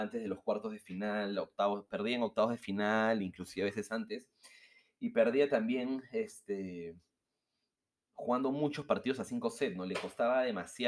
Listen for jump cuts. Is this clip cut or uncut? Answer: uncut